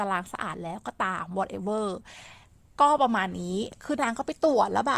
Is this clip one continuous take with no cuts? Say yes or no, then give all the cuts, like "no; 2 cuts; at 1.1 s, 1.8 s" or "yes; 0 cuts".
yes; 0 cuts